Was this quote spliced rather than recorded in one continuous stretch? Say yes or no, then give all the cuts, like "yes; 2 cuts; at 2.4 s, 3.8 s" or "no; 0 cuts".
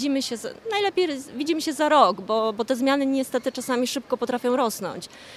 no; 0 cuts